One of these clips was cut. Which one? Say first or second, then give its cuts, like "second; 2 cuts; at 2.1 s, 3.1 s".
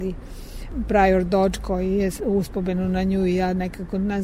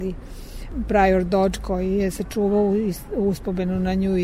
first; 1 cut; at 2.2 s